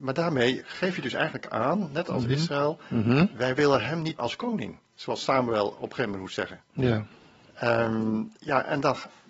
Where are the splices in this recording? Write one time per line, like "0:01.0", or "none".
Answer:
0:04.2
0:08.4

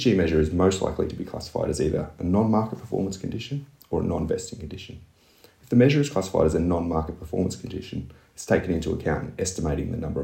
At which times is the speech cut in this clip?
none

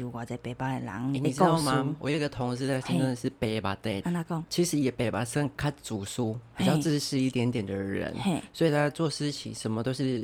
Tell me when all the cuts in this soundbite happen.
0:04.0

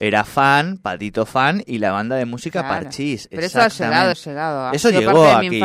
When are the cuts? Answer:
0:04.1

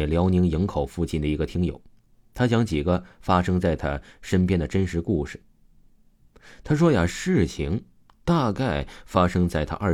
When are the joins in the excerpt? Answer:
none

